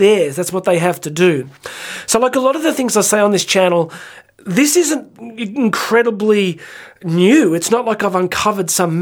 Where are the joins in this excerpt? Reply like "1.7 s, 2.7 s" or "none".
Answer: none